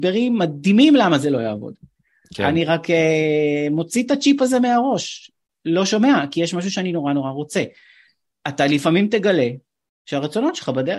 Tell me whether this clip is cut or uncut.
uncut